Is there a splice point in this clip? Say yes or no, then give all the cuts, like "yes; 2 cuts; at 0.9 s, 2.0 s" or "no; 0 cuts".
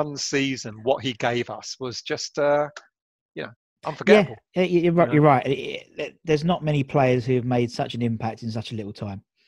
no; 0 cuts